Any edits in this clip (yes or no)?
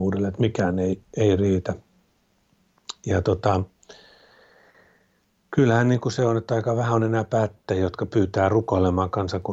no